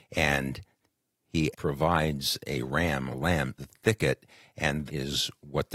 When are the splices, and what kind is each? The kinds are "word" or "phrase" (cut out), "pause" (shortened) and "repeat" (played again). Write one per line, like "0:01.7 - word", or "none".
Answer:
0:01.5 - word
0:03.1 - word
0:03.6 - word
0:04.9 - word